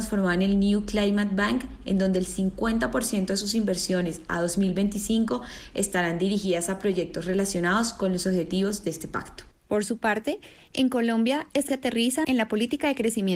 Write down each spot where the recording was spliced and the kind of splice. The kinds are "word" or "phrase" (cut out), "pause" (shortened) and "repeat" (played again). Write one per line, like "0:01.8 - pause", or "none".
0:11.7 - word
0:12.2 - phrase

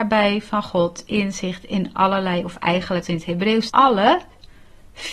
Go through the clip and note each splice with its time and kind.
0:03.0 - word
0:03.7 - word

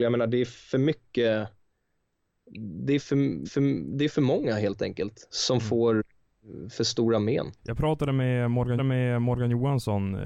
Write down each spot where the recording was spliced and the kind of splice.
0:03.4 - repeat
0:05.3 - word
0:07.6 - pause
0:08.8 - repeat

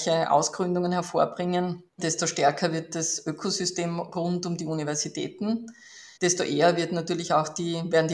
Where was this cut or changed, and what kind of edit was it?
0:01.9 - pause
0:06.2 - pause

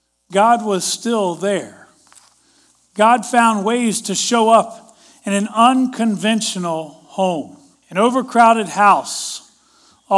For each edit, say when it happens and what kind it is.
0:07.7 - pause

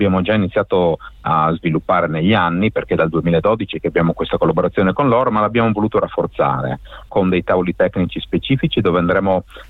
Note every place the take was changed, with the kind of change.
none

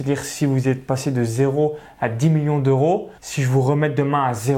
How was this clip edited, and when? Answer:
0:03.2 - pause

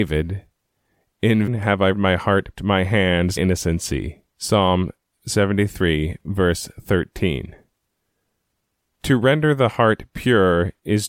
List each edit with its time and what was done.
0:01.5 - word
0:01.9 - word
0:02.6 - phrase
0:03.4 - word
0:04.3 - pause

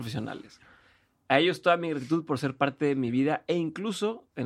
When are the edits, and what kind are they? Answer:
none

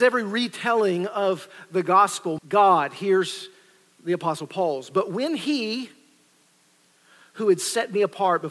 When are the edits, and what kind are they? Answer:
0:02.4 - phrase

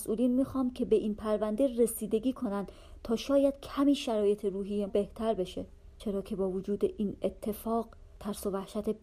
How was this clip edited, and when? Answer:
0:04.9 - word

